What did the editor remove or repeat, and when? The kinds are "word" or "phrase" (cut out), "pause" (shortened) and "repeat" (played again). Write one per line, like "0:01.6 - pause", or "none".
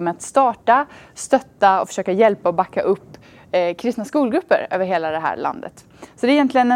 none